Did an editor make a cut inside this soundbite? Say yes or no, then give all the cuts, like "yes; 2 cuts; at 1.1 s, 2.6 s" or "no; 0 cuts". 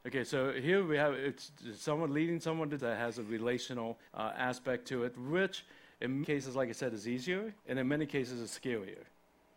yes; 4 cuts; at 2.8 s, 4.1 s, 6.2 s, 7.6 s